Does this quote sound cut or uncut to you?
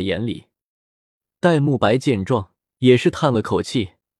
cut